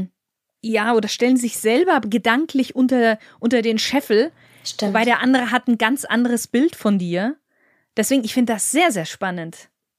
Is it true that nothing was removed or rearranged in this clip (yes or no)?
yes